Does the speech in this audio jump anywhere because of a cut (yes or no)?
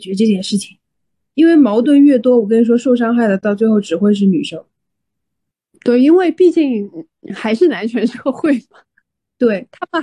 no